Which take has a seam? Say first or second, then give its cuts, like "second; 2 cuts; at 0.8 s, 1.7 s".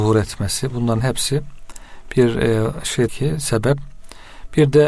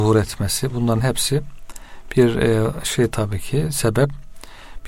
first; 1 cut; at 3.1 s